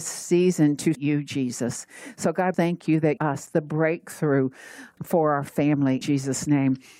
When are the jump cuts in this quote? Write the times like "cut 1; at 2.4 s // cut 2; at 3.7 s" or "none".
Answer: cut 1; at 0.9 s // cut 2; at 2.5 s // cut 3; at 3.2 s // cut 4; at 5.0 s // cut 5; at 6.0 s